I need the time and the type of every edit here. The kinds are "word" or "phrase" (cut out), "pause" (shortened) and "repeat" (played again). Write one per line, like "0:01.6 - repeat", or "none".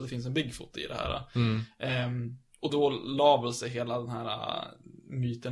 0:02.7 - word